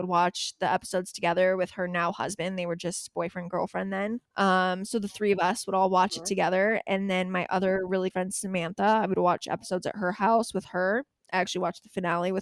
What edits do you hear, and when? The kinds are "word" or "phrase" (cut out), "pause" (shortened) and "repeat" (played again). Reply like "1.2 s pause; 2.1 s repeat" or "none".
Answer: 4.3 s pause; 8.1 s word